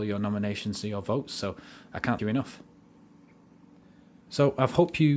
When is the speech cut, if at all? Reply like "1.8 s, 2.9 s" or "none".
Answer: 2.2 s